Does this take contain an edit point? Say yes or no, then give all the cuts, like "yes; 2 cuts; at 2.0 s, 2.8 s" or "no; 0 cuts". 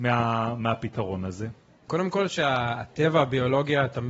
no; 0 cuts